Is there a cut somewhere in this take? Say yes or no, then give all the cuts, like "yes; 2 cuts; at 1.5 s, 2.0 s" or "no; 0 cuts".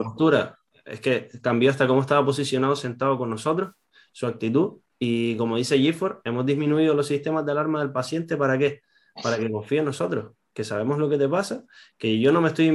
no; 0 cuts